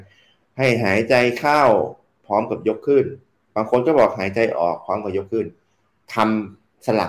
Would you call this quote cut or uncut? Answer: uncut